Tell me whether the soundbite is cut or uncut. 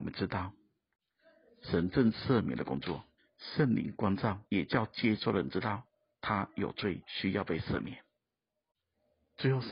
cut